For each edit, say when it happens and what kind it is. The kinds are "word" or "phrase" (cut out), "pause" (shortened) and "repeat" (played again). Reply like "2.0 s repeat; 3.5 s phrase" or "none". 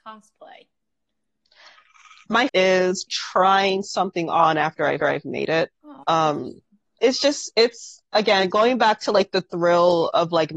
2.5 s phrase; 3.1 s word; 5.0 s repeat; 5.7 s pause; 7.0 s word